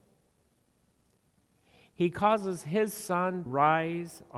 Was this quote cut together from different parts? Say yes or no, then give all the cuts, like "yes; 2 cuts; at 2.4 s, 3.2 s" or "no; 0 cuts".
yes; 1 cut; at 3.5 s